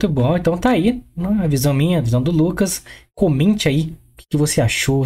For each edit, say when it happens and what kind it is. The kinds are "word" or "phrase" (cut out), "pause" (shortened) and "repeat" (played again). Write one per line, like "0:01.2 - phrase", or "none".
none

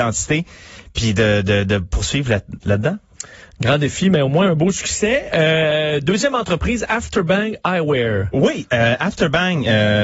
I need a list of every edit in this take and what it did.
none

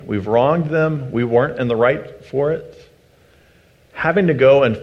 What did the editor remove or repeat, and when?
none

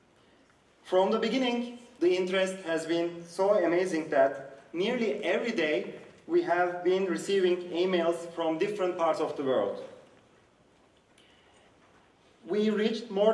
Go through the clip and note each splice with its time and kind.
none

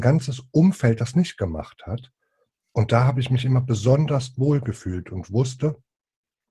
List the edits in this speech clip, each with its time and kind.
none

